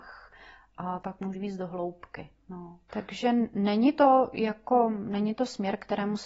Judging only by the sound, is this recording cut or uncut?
cut